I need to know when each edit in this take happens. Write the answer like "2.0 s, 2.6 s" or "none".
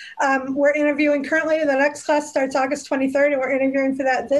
none

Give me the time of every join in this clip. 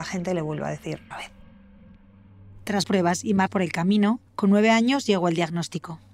1.1 s, 2.8 s, 3.5 s, 4.3 s

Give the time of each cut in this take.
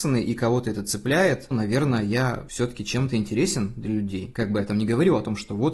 1.5 s

